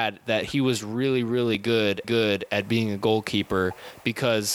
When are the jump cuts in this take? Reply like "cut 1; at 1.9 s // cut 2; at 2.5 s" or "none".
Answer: cut 1; at 2.0 s